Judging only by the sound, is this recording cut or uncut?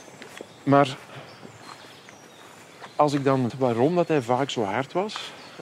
cut